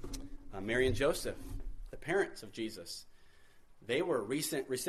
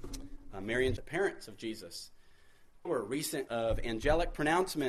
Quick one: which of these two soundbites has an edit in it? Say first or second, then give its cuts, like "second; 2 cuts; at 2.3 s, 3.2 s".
second; 3 cuts; at 1.0 s, 2.8 s, 3.5 s